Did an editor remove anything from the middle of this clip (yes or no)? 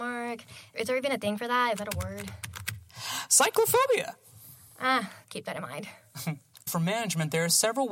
yes